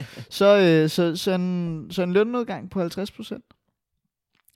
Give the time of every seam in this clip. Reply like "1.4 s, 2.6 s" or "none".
none